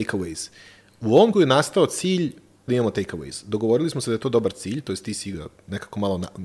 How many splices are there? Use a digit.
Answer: 2